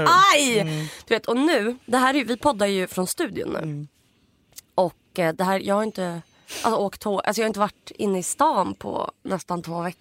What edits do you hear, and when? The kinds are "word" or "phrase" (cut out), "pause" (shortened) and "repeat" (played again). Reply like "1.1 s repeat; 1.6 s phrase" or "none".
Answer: none